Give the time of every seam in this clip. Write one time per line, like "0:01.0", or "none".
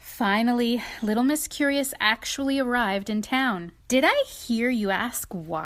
0:03.8